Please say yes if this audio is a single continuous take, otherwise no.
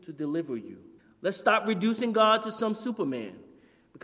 no